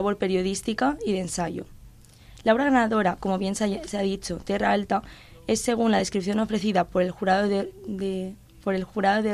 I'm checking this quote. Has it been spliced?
no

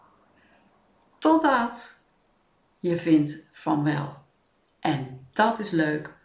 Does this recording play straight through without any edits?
yes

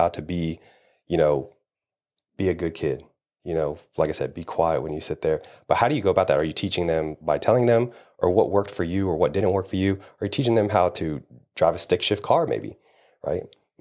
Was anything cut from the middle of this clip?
no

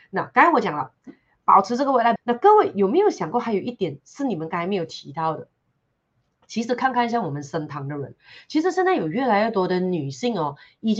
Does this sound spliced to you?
yes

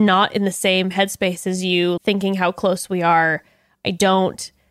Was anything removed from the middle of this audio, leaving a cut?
yes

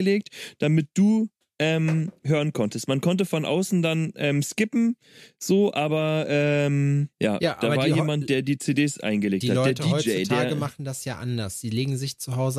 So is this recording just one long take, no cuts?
yes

